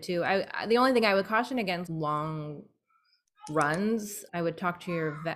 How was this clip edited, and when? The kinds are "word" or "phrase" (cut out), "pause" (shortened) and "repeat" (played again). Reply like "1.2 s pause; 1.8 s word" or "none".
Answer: 1.9 s word; 4.3 s word